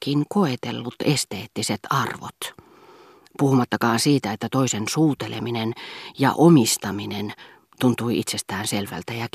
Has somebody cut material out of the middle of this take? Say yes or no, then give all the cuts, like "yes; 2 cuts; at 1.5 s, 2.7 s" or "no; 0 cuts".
no; 0 cuts